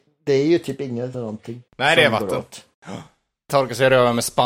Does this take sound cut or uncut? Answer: cut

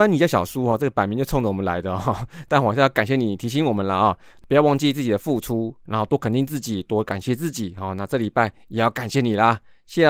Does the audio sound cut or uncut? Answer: uncut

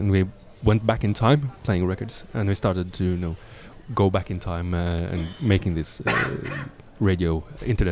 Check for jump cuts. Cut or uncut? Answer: uncut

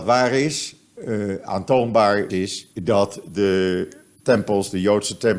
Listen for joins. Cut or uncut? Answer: cut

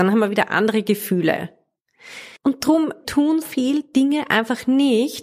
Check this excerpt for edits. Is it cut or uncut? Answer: cut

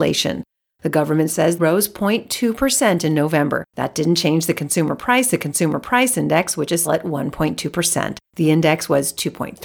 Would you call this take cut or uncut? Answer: cut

